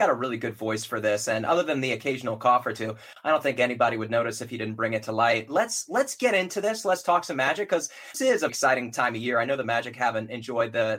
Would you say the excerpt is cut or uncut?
cut